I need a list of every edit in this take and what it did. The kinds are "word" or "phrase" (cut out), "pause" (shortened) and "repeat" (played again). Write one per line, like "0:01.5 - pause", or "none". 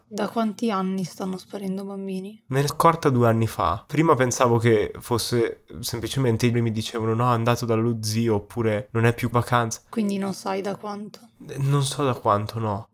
0:02.7 - word
0:06.5 - word
0:09.3 - phrase